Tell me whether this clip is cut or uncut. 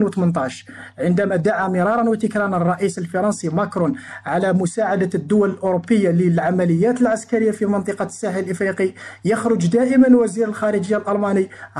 uncut